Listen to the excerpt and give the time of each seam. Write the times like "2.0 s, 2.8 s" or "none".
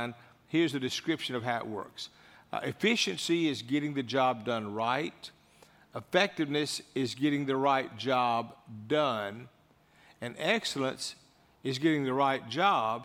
none